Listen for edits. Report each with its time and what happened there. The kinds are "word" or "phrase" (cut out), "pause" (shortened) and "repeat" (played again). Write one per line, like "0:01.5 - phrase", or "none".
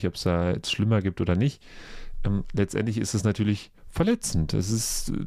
0:03.8 - pause